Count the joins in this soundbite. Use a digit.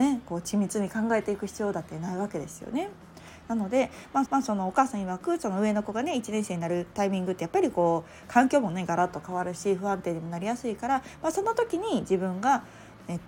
2